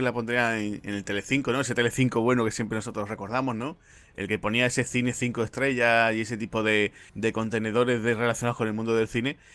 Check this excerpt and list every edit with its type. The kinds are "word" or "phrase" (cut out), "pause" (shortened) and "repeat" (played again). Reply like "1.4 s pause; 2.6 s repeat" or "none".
7.1 s pause